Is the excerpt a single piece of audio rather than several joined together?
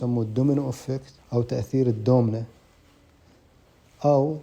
no; 1 cut; at 1.2 s

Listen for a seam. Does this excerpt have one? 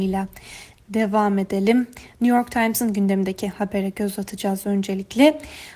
no; 0 cuts

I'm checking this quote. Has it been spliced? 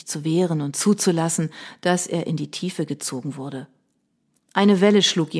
no; 0 cuts

